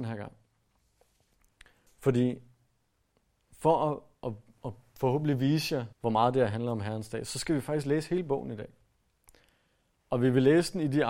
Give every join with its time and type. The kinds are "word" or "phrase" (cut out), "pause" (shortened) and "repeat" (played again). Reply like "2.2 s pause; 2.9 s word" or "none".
5.9 s pause